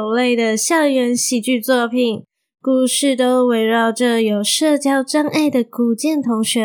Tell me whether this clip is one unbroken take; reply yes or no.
yes